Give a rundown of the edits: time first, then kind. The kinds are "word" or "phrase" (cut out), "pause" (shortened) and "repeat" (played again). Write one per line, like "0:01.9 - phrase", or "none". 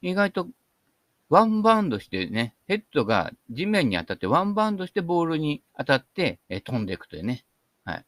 0:05.7 - pause
0:06.4 - pause